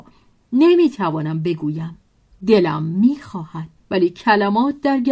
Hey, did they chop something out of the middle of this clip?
yes; 2 cuts; at 2.1 s, 3.8 s

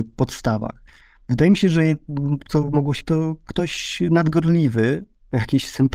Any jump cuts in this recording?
yes; 2 cuts; at 2.4 s, 3.0 s

